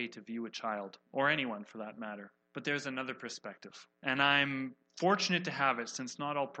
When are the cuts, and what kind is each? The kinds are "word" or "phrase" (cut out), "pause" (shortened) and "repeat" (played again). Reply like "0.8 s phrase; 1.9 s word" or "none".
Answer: 2.4 s pause; 3.9 s pause